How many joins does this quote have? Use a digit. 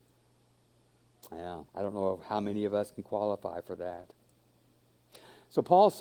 1